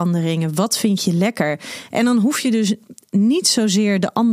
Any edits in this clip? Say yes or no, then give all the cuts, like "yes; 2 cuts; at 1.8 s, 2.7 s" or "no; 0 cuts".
no; 0 cuts